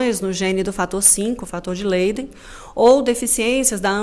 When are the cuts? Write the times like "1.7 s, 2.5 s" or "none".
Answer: none